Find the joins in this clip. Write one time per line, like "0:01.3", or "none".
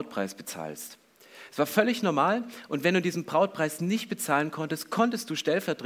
none